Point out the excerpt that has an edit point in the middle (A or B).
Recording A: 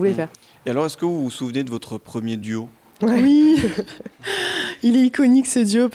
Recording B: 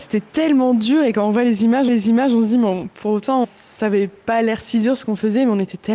B